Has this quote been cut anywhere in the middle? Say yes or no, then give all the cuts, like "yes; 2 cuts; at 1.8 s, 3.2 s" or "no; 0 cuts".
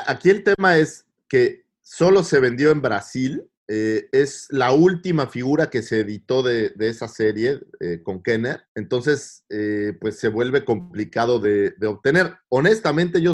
yes; 2 cuts; at 3.5 s, 8.7 s